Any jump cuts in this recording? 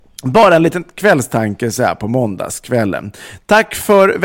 no; 0 cuts

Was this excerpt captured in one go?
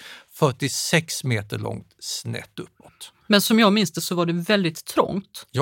yes; 0 cuts

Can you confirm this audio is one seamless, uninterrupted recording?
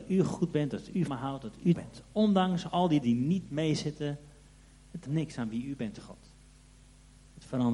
no; 4 cuts; at 1.1 s, 1.7 s, 3.0 s, 5.1 s

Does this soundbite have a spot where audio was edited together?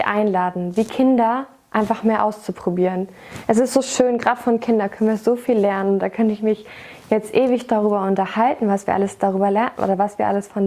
no; 0 cuts

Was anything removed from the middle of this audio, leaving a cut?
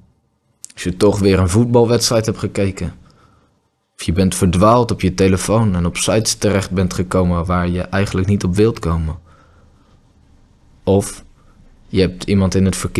no; 0 cuts

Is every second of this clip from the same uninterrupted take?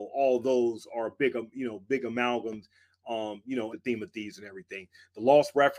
no; 1 cut; at 3.7 s

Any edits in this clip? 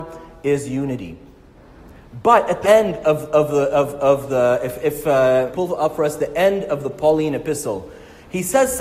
yes; 3 cuts; at 2.6 s, 4.8 s, 5.5 s

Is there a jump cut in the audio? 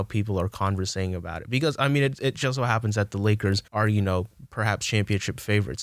yes; 1 cut; at 3.7 s

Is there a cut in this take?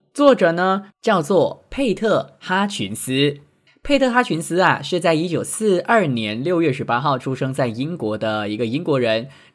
no; 0 cuts

